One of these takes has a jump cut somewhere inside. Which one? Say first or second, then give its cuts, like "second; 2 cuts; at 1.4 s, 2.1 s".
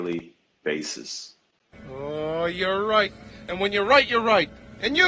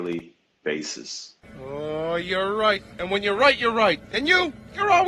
second; 3 cuts; at 1.4 s, 2.9 s, 4.0 s